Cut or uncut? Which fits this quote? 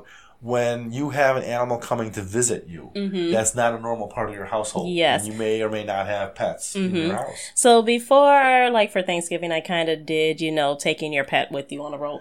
uncut